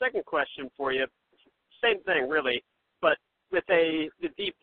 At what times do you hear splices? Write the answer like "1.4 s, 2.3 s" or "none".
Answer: 3.0 s